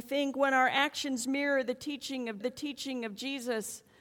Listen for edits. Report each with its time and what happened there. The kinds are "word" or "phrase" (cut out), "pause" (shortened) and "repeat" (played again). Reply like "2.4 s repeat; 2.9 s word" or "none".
2.4 s repeat